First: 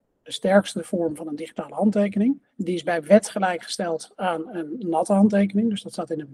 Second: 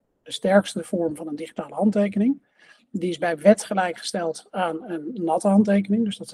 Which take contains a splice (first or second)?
first